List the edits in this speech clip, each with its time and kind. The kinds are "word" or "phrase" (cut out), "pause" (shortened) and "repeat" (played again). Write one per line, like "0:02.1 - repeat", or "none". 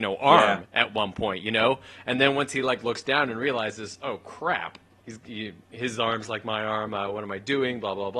none